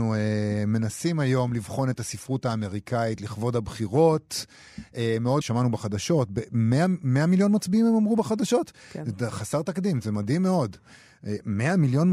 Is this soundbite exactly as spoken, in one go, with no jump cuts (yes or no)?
no